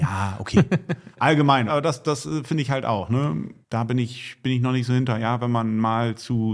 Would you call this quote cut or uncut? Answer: cut